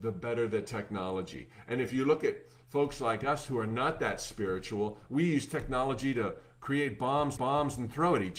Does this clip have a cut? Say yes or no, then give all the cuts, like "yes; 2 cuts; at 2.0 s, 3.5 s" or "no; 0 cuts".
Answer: yes; 1 cut; at 7.4 s